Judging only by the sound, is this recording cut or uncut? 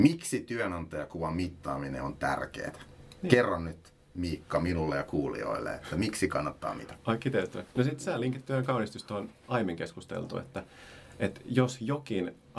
uncut